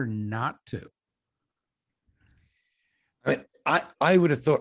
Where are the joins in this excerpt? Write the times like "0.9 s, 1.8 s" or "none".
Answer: none